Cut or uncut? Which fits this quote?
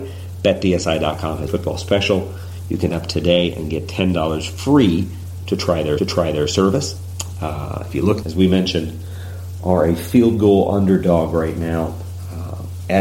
cut